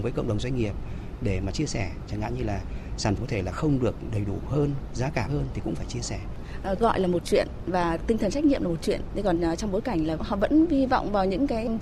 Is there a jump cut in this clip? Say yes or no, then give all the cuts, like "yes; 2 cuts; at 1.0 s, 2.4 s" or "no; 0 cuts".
yes; 3 cuts; at 3.2 s, 5.3 s, 6.8 s